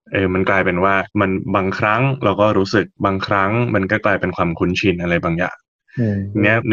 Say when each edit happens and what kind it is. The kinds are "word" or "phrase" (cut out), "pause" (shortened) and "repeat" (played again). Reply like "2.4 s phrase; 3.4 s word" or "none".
1.1 s pause; 2.9 s pause